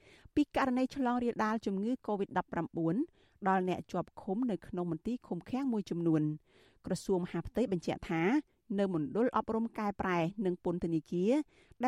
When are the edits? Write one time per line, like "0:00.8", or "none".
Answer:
none